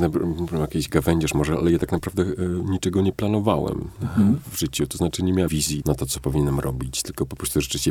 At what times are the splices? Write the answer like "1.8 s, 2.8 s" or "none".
5.5 s, 5.8 s